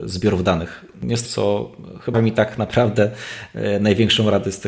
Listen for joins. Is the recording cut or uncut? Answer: cut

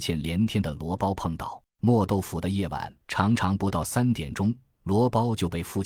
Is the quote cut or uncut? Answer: cut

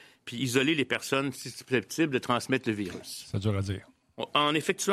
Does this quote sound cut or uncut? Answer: uncut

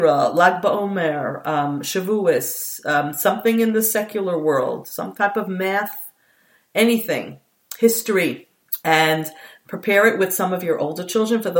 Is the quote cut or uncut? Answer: uncut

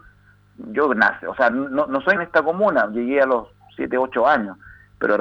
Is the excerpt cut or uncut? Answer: cut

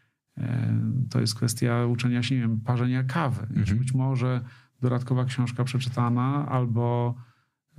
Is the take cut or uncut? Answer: uncut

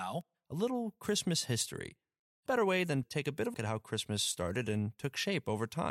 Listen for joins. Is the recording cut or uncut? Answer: cut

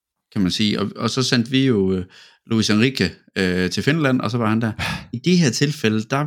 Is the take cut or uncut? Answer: uncut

